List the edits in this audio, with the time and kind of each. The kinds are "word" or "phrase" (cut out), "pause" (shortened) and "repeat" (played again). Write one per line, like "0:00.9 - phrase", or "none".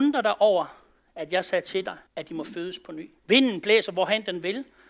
0:02.1 - pause
0:03.2 - pause